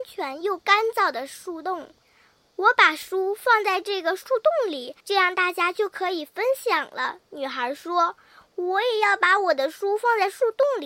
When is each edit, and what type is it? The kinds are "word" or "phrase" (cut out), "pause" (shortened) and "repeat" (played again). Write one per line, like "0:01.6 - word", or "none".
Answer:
0:02.0 - pause
0:05.0 - pause